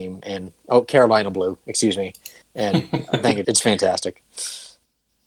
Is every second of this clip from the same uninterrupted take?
no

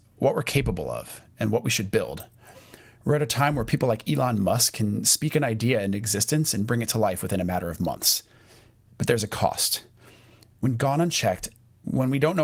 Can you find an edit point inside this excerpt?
no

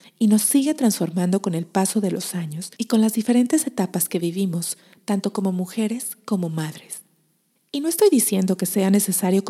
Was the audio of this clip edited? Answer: yes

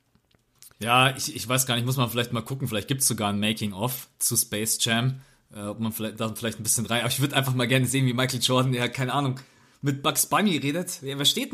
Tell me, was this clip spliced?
no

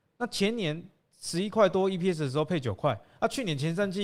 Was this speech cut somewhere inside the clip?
no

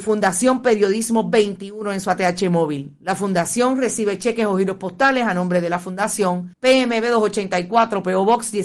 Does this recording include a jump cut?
yes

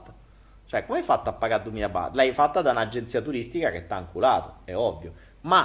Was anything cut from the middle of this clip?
no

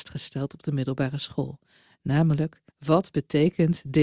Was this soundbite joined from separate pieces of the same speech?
yes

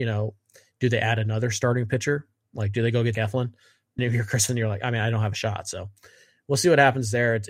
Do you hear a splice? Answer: yes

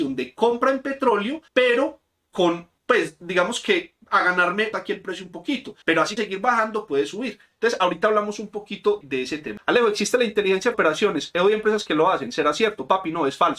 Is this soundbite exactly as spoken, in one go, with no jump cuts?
no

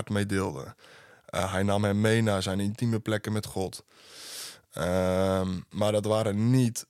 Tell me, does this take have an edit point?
no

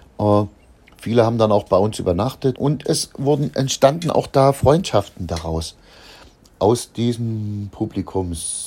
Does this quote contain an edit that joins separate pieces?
yes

